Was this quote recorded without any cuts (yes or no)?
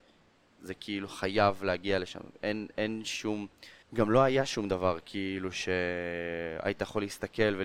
no